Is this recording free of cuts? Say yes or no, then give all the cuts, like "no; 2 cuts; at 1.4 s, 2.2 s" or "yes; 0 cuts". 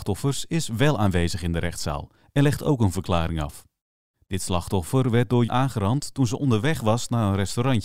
no; 1 cut; at 5.5 s